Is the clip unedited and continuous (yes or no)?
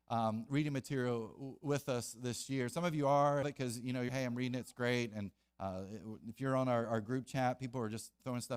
no